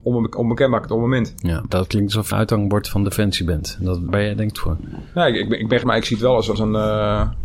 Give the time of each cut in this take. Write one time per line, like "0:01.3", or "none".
0:01.7
0:02.3
0:04.1
0:04.6
0:05.8
0:06.6